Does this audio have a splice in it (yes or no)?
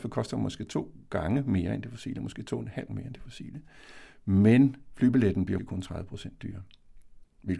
yes